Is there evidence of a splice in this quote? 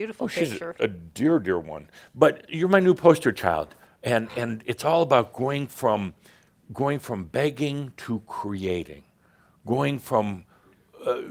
no; 0 cuts

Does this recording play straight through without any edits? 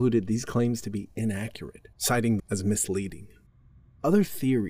no; 3 cuts; at 1.9 s, 2.4 s, 3.5 s

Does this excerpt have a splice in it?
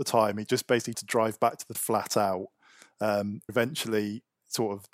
yes; 3 cuts; at 0.9 s, 1.7 s, 3.5 s

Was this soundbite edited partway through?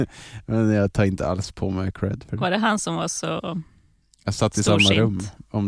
yes; 1 cut; at 4.4 s

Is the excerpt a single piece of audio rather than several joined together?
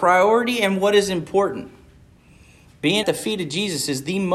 no; 1 cut; at 3.0 s

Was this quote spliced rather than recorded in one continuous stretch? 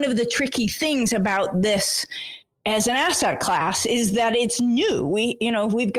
no; 0 cuts

